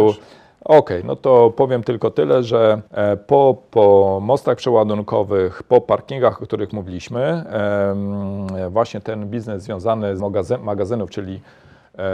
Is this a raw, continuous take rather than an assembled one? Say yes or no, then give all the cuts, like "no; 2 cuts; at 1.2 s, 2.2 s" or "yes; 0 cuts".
no; 2 cuts; at 2.9 s, 10.2 s